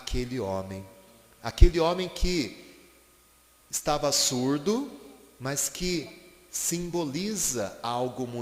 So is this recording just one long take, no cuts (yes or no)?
yes